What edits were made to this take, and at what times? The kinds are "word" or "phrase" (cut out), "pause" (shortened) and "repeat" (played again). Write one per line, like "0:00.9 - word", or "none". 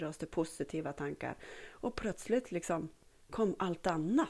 none